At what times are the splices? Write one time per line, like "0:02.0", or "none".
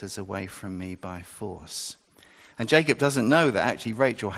none